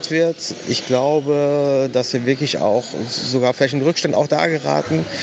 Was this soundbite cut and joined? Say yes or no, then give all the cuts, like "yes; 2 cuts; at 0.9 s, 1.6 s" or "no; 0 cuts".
no; 0 cuts